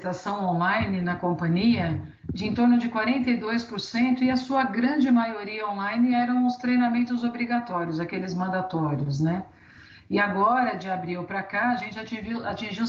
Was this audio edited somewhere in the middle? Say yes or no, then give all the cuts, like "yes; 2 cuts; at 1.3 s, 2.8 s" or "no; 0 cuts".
no; 0 cuts